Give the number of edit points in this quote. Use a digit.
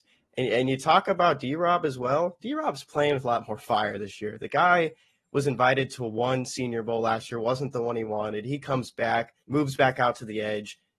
1